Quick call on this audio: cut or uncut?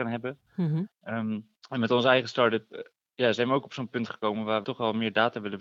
cut